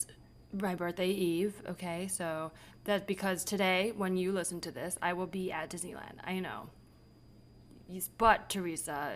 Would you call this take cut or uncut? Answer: uncut